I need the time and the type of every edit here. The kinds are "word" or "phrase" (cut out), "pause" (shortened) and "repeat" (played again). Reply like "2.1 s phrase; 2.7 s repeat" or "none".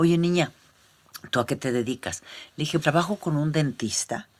2.8 s word